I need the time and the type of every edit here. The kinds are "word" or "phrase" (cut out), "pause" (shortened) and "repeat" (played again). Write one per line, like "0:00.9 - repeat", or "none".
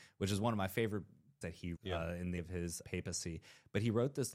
0:01.4 - word
0:01.8 - word
0:02.4 - word
0:02.8 - word

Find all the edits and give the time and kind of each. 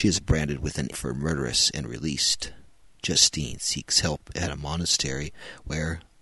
0:00.9 - word

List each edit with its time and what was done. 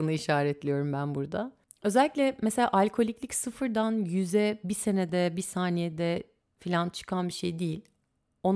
none

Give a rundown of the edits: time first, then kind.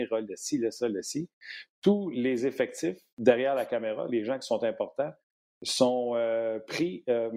none

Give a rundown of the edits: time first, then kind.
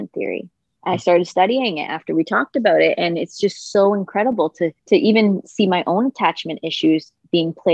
0:04.8 - pause

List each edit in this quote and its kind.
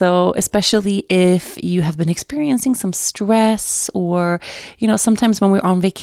none

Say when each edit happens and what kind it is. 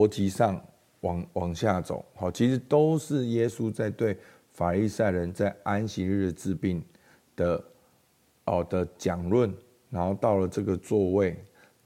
none

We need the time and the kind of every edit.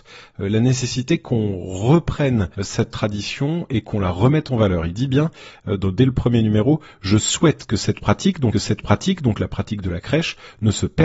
0:02.5 - pause
0:08.5 - repeat

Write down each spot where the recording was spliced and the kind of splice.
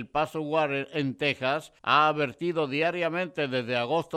0:01.8 - pause

